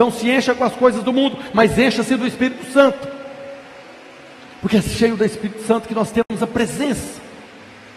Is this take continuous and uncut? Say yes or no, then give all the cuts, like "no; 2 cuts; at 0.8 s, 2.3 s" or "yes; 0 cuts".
yes; 0 cuts